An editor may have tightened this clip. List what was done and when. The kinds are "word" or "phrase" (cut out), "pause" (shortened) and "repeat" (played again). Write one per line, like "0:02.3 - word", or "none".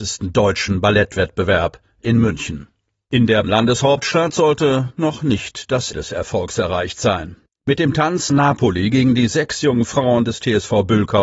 0:03.4 - word
0:05.9 - word
0:08.3 - word